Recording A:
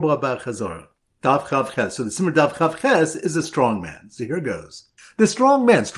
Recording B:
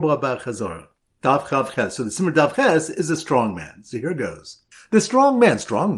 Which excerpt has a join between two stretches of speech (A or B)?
B